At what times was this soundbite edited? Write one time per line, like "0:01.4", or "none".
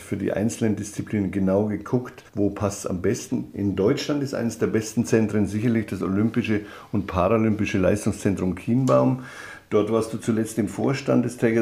0:02.3